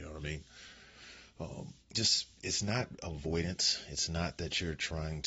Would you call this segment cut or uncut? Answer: cut